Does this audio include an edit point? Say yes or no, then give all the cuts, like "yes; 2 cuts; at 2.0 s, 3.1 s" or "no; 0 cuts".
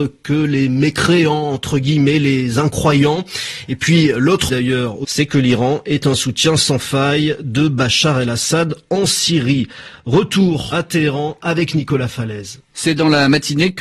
yes; 3 cuts; at 4.5 s, 5.0 s, 10.7 s